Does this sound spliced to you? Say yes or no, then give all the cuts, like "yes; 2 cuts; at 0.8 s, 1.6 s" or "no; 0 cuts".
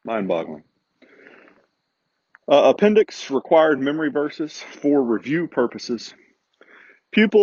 no; 0 cuts